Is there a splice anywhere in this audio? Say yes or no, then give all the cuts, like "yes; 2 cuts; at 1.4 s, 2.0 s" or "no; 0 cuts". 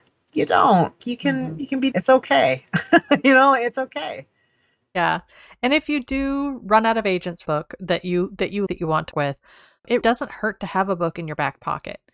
yes; 6 cuts; at 1.0 s, 1.9 s, 7.4 s, 8.7 s, 9.1 s, 10.0 s